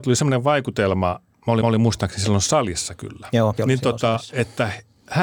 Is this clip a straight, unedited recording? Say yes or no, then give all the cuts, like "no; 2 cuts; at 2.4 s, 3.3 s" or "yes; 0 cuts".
no; 2 cuts; at 1.6 s, 3.6 s